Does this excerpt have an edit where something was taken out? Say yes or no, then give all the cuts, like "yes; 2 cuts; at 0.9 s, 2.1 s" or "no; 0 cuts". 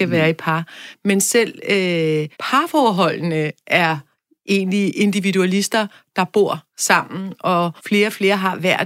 yes; 2 cuts; at 2.3 s, 7.8 s